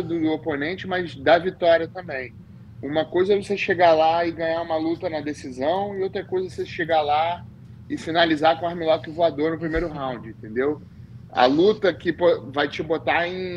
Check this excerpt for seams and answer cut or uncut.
uncut